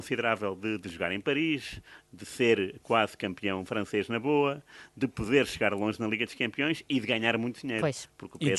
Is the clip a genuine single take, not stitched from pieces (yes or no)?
yes